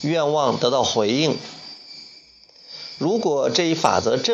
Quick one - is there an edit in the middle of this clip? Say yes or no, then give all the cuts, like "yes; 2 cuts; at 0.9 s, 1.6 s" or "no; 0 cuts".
no; 0 cuts